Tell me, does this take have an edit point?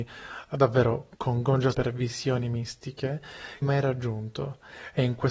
yes; 3 cuts; at 1.1 s, 1.7 s, 3.6 s

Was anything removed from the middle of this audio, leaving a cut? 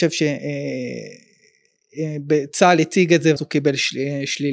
yes; 1 cut; at 3.4 s

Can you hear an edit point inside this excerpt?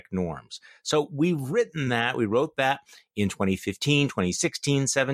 no; 0 cuts

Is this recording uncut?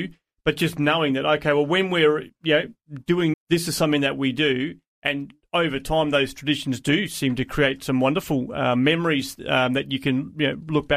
no; 1 cut; at 3.3 s

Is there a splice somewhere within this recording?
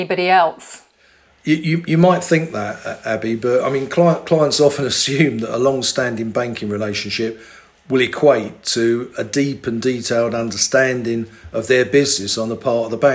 no; 0 cuts

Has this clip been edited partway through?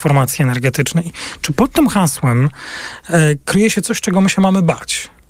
no; 0 cuts

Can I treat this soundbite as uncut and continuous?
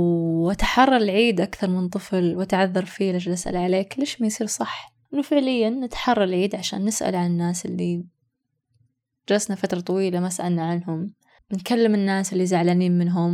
yes; 0 cuts

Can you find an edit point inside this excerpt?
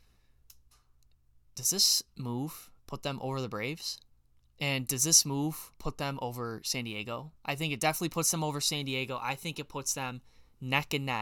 yes; 4 cuts; at 2.8 s, 4.3 s, 5.7 s, 7.4 s

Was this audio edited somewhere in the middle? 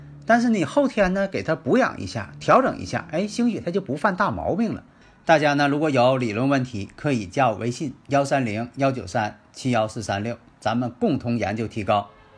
no; 0 cuts

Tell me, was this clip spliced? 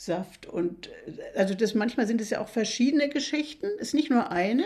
no; 0 cuts

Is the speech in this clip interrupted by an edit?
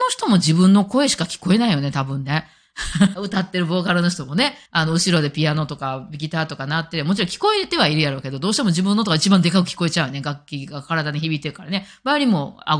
yes; 2 cuts; at 3.1 s, 4.7 s

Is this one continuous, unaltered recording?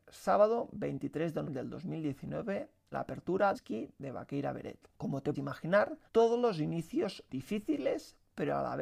no; 7 cuts; at 1.4 s, 2.9 s, 3.5 s, 4.9 s, 5.3 s, 6.1 s, 7.3 s

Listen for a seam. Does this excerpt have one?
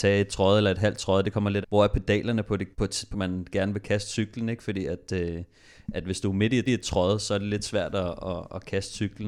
yes; 4 cuts; at 1.6 s, 2.7 s, 3.1 s, 6.7 s

